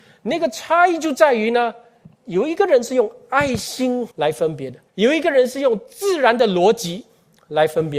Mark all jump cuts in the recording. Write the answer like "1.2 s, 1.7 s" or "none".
2.1 s, 4.1 s, 4.9 s